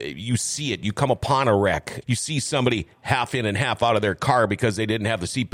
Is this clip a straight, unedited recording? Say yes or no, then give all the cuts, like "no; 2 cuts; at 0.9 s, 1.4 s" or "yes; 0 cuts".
no; 1 cut; at 2.0 s